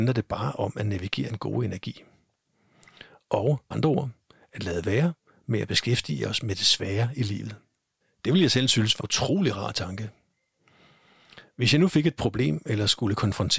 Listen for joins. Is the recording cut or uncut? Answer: cut